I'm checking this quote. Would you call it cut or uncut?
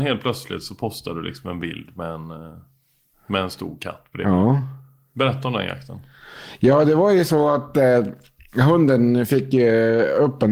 uncut